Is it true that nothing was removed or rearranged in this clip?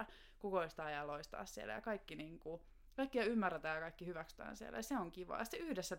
yes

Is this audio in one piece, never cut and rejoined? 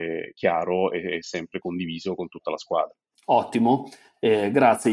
yes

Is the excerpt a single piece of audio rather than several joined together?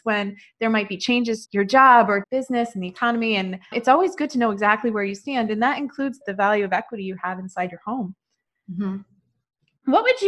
no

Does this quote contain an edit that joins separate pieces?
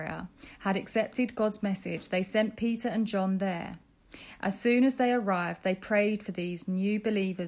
no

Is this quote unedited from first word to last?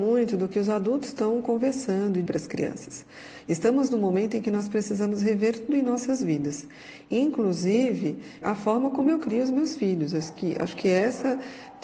no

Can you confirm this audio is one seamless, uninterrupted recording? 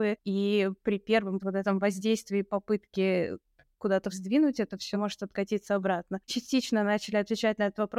no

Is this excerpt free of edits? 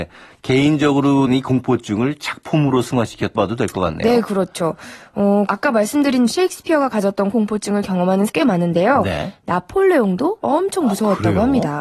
no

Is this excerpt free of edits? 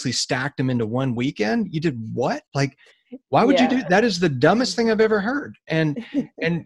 no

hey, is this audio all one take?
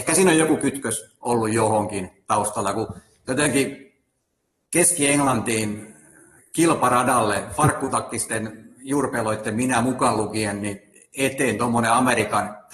yes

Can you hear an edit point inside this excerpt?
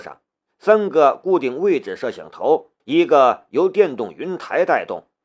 yes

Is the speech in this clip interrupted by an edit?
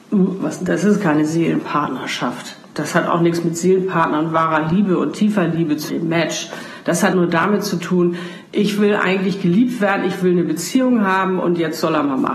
yes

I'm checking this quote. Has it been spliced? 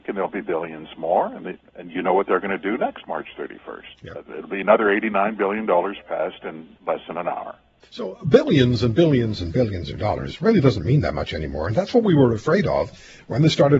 yes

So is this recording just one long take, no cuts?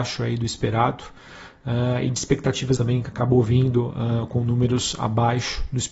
no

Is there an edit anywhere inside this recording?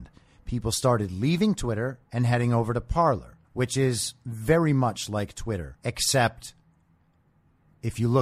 yes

